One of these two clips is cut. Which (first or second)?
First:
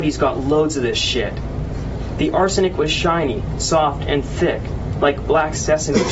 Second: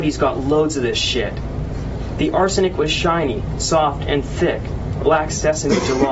second